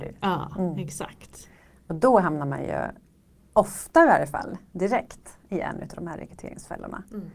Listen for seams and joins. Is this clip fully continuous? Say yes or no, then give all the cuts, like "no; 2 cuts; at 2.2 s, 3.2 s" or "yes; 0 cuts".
yes; 0 cuts